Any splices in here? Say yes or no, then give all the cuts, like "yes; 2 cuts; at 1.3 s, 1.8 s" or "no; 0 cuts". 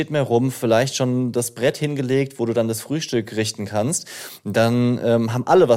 no; 0 cuts